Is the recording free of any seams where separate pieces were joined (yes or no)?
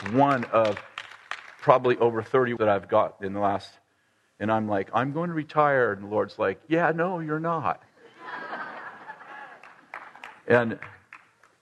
no